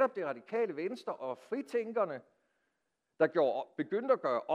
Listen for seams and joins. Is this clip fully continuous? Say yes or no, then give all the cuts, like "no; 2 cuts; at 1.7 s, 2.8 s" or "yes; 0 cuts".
yes; 0 cuts